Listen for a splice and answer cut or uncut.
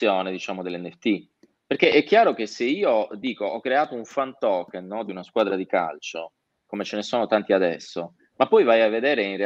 uncut